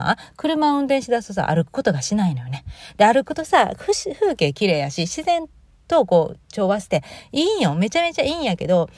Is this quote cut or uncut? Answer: uncut